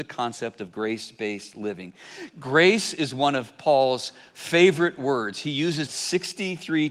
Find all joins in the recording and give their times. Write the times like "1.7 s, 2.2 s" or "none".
5.9 s